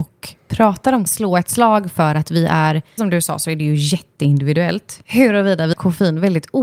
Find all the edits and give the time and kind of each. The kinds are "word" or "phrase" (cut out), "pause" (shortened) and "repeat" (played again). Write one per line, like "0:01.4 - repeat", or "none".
0:01.1 - word
0:03.0 - word
0:05.7 - word